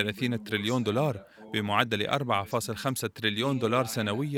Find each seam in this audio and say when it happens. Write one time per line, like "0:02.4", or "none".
none

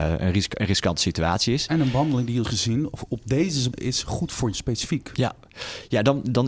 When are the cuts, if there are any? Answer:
0:02.4
0:03.7
0:04.5

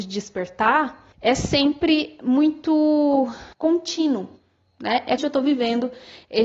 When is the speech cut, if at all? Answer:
0:01.1
0:03.5
0:05.2

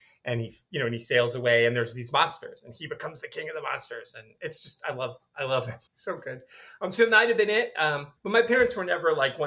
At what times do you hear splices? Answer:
0:05.9
0:08.2

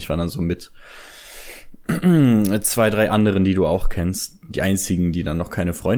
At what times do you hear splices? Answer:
0:01.8

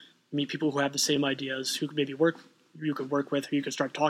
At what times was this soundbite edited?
none

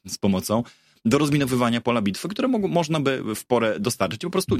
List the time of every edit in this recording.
none

